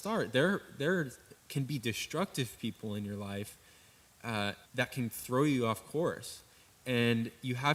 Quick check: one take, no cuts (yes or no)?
no